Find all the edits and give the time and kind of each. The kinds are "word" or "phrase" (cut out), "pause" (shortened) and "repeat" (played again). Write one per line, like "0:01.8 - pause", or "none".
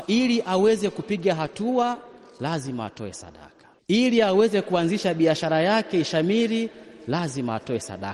none